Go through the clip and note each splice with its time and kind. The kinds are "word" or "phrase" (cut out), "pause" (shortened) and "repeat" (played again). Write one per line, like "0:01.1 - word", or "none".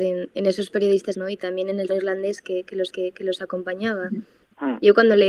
0:01.1 - word
0:01.9 - word
0:02.9 - repeat